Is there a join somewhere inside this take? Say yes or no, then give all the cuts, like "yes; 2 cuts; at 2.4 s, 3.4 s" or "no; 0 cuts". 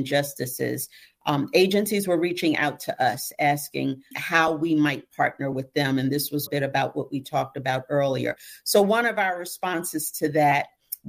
yes; 2 cuts; at 4.1 s, 6.5 s